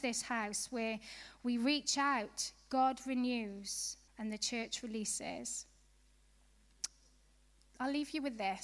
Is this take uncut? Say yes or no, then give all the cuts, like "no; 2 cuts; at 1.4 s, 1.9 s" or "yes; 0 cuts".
no; 1 cut; at 4.1 s